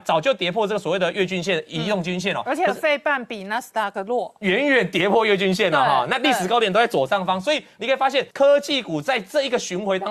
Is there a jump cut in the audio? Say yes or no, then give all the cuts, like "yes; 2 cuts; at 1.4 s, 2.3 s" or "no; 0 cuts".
yes; 1 cut; at 8.3 s